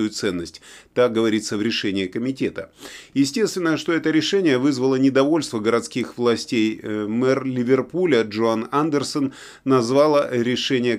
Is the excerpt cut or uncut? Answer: uncut